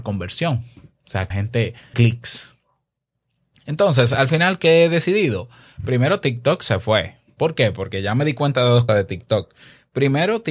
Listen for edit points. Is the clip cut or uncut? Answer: cut